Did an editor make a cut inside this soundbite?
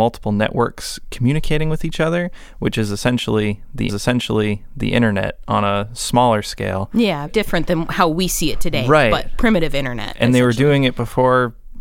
yes; 2 cuts; at 3.9 s, 7.3 s

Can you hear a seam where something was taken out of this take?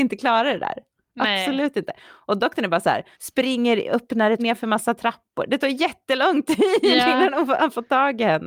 yes; 2 cuts; at 3.1 s, 4.4 s

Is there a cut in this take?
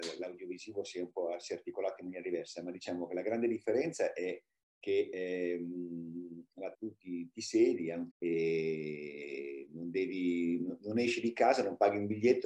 yes; 2 cuts; at 6.7 s, 8.1 s

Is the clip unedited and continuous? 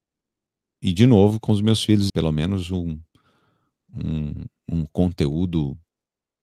no; 1 cut; at 2.1 s

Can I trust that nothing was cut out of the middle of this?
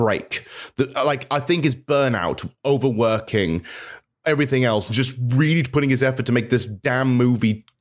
yes; 0 cuts

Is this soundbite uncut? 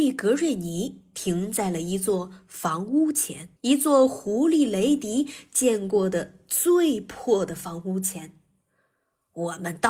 no; 1 cut; at 3.6 s

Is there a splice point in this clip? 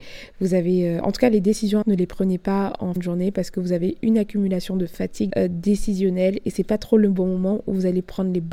yes; 3 cuts; at 1.8 s, 3.0 s, 5.3 s

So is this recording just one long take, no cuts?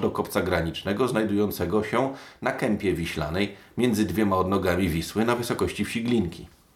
yes; 0 cuts

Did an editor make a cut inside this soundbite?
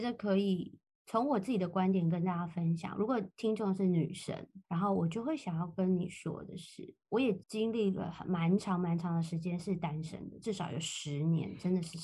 yes; 2 cuts; at 4.6 s, 7.4 s

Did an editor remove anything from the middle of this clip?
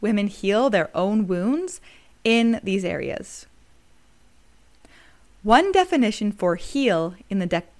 no; 0 cuts

